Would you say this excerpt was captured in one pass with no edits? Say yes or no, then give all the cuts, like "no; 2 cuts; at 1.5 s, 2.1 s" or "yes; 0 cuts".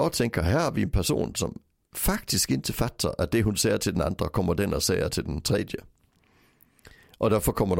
yes; 0 cuts